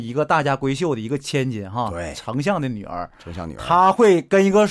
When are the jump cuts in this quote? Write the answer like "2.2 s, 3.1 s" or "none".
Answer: none